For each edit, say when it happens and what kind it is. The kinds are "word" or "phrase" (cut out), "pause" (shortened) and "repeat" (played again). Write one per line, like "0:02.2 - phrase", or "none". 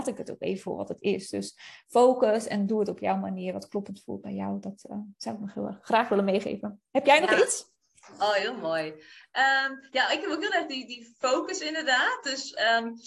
none